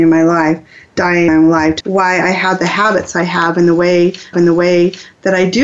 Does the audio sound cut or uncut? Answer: cut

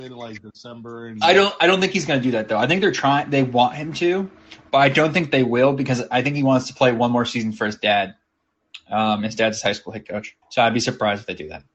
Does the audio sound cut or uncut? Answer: cut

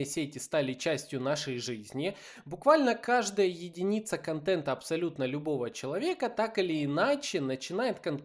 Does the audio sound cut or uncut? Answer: uncut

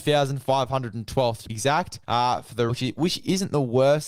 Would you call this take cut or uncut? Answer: cut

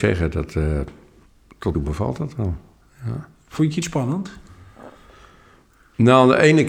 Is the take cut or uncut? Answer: cut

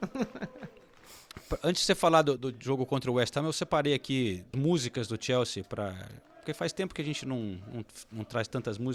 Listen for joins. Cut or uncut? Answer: cut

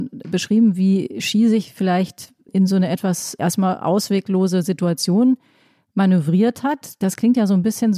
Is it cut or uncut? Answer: cut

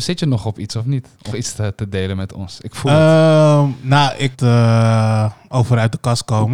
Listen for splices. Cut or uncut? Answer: cut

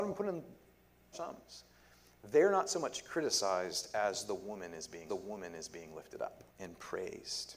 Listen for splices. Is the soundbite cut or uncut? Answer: cut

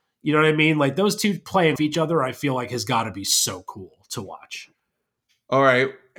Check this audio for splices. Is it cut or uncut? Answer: cut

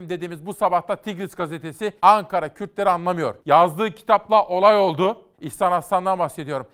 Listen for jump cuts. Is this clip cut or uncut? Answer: cut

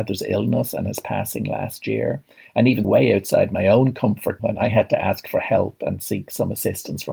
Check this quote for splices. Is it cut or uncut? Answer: cut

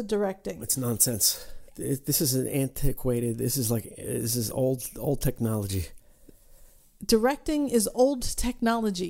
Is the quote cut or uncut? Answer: uncut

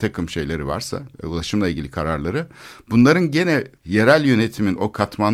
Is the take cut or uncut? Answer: cut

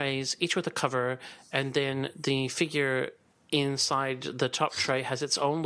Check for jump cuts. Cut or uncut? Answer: uncut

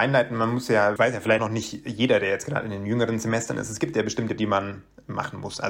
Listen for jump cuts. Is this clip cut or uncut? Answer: cut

